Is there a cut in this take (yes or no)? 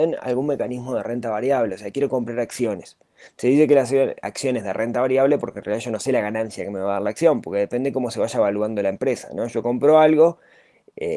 no